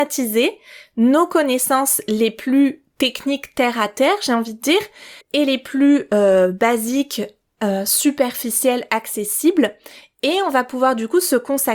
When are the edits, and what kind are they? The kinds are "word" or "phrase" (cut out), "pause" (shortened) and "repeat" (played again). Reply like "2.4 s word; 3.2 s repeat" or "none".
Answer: 5.2 s pause